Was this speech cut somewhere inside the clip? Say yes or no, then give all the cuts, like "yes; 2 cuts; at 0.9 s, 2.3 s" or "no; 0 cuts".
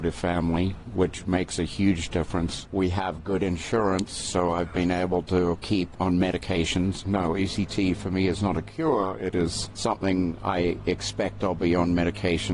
no; 0 cuts